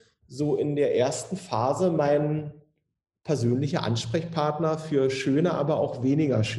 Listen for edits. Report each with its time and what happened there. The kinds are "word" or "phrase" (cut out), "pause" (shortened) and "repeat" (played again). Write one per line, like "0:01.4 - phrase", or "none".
none